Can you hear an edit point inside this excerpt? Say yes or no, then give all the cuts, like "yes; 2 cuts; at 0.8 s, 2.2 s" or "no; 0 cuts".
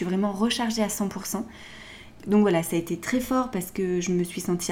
no; 0 cuts